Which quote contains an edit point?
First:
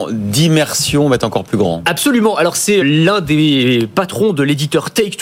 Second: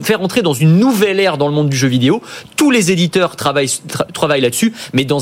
first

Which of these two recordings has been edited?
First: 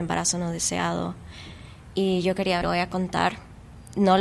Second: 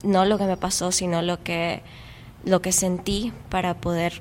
first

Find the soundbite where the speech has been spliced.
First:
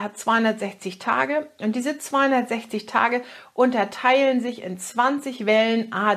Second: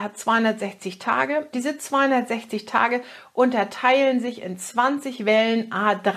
second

